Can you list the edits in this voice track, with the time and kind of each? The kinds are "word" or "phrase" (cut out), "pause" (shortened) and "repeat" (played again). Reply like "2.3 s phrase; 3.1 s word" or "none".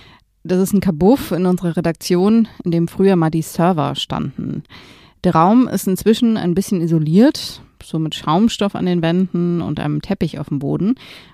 none